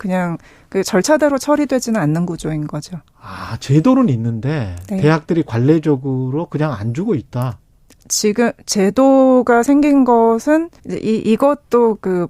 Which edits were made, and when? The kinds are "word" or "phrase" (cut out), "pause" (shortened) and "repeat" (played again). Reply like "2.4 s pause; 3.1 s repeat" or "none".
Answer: 10.8 s pause